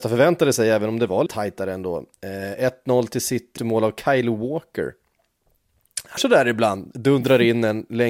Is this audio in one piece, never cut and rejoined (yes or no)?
no